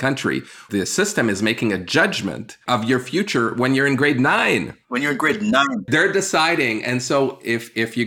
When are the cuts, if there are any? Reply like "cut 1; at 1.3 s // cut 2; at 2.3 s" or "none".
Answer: cut 1; at 2.6 s // cut 2; at 4.8 s